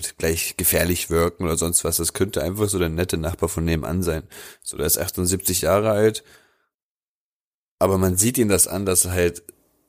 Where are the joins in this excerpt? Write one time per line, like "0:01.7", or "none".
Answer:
none